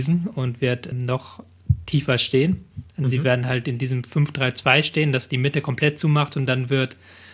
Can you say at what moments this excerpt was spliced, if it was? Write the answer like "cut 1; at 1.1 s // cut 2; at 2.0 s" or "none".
cut 1; at 0.9 s